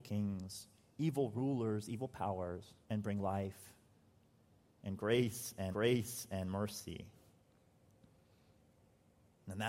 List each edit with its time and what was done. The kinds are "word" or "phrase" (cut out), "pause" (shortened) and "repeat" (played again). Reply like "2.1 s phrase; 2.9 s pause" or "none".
2.8 s pause; 5.7 s repeat